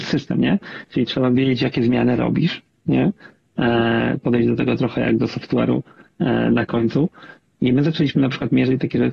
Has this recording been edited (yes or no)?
no